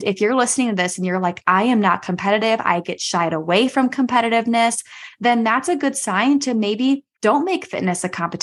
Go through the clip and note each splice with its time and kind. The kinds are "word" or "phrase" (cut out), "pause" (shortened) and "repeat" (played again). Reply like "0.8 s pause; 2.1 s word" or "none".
7.1 s pause